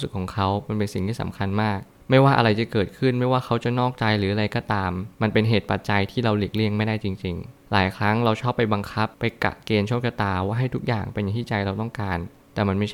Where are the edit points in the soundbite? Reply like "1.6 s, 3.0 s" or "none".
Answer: 5.1 s, 9.1 s